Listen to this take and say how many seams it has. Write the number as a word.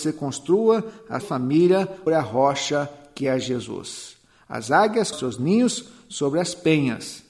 three